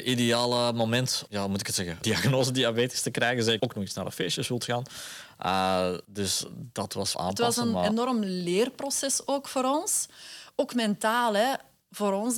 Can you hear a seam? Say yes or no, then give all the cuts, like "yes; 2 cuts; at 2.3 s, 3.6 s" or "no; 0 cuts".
yes; 5 cuts; at 1.3 s, 2.0 s, 3.6 s, 6.0 s, 7.1 s